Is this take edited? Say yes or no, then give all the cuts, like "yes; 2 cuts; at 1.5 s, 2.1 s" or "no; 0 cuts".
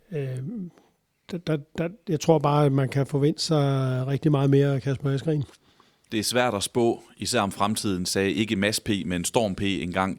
no; 0 cuts